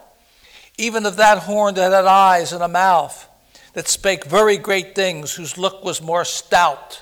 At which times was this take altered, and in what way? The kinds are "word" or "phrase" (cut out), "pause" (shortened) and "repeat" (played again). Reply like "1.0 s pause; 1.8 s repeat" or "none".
none